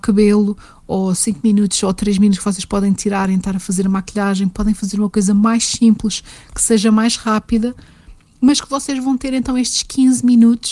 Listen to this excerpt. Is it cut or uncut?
uncut